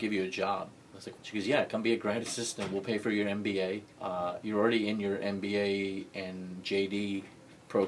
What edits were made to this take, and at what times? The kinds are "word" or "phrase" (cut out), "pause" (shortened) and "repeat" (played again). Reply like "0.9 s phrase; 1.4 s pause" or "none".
1.2 s word; 3.9 s pause